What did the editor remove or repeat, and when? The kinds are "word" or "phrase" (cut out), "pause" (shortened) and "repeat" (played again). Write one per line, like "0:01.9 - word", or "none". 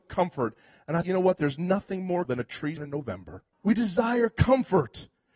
0:01.0 - word
0:02.2 - word
0:02.8 - word
0:03.5 - pause